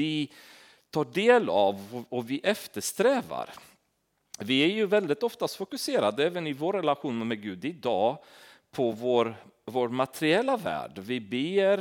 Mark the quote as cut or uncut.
uncut